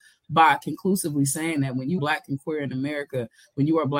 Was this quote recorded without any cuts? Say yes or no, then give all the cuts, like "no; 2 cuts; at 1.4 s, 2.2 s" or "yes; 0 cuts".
no; 1 cut; at 2.0 s